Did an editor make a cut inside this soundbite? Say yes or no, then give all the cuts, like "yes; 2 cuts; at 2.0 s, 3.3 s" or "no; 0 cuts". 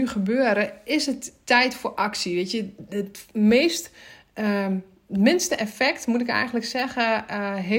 no; 0 cuts